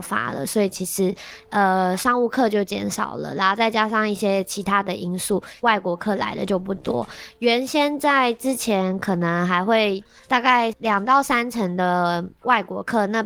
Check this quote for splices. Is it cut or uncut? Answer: cut